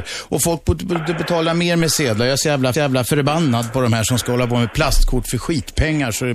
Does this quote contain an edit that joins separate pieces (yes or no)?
yes